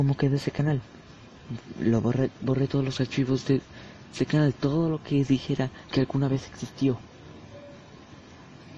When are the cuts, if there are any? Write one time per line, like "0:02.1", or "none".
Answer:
none